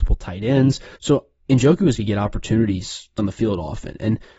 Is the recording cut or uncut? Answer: cut